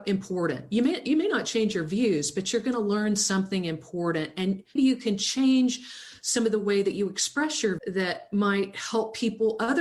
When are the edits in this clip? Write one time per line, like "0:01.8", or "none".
0:04.8
0:07.8